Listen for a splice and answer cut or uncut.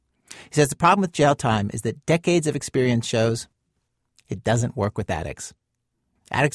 uncut